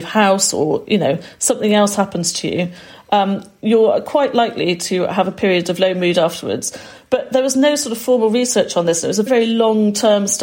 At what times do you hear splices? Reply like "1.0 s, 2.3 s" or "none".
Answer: 9.3 s